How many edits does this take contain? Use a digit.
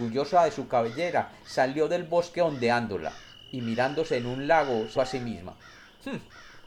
1